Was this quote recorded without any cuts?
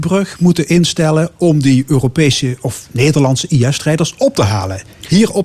yes; 0 cuts

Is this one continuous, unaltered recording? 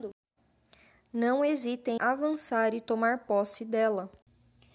no; 1 cut; at 2.0 s

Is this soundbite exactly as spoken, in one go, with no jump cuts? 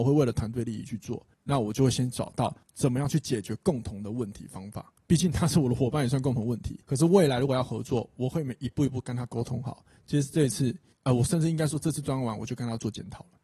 no; 4 cuts; at 1.3 s, 2.6 s, 6.8 s, 10.9 s

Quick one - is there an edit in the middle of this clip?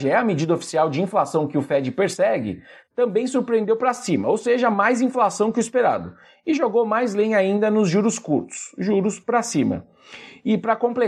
no; 0 cuts

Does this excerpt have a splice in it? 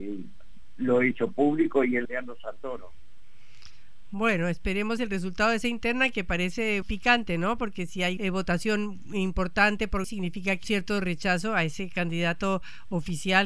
yes; 7 cuts; at 1.1 s, 2.0 s, 5.0 s, 6.8 s, 8.2 s, 10.0 s, 10.6 s

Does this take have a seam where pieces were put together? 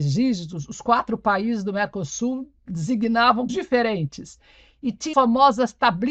yes; 2 cuts; at 3.5 s, 5.1 s

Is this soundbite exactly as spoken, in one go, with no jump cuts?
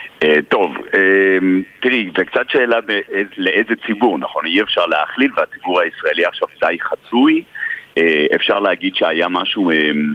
yes; 0 cuts

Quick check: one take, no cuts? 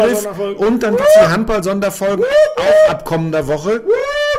yes; 0 cuts

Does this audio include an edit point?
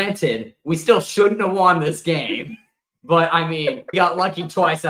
yes; 1 cut; at 3.9 s

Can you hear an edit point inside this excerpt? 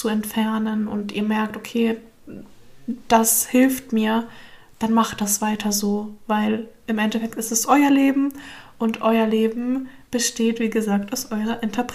no; 0 cuts

